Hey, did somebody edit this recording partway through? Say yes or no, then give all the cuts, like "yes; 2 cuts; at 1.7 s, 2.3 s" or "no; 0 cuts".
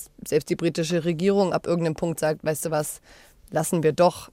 no; 0 cuts